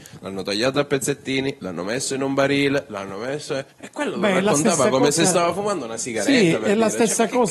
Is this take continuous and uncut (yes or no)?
no